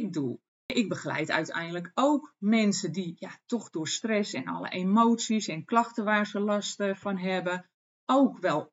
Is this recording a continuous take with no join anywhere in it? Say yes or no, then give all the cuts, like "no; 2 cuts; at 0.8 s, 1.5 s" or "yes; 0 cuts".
yes; 0 cuts